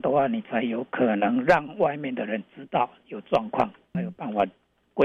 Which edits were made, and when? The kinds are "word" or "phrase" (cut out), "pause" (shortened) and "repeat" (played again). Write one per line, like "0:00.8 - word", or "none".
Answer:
0:03.9 - phrase

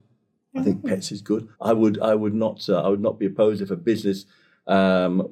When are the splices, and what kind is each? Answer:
0:01.5 - pause

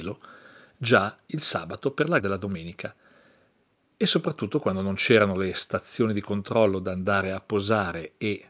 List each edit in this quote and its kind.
0:02.2 - word

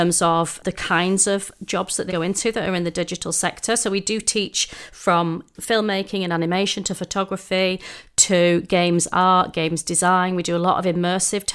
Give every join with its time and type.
0:02.1 - word

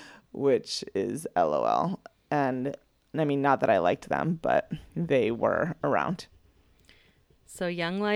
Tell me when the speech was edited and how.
none

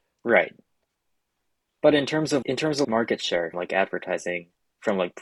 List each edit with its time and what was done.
0:02.4 - word
0:02.8 - word
0:03.5 - word

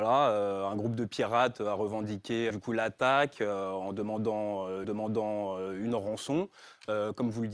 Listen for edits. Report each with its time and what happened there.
0:02.5 - word
0:04.8 - repeat

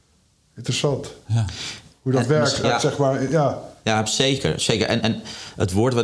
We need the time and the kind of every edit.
0:02.6 - phrase
0:05.0 - word

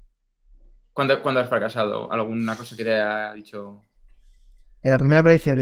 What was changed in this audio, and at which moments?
none

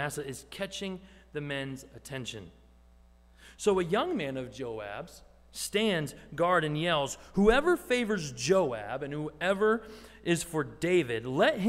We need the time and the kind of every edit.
none

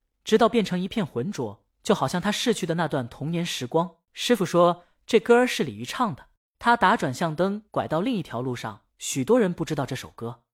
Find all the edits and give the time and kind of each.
0:04.0 - pause
0:06.3 - pause
0:07.7 - pause
0:08.9 - pause

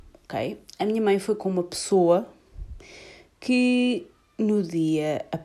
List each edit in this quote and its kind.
none

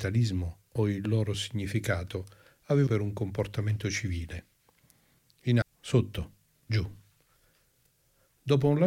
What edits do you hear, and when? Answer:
0:02.9 - word
0:05.6 - word

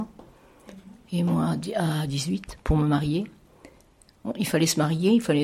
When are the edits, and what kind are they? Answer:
none

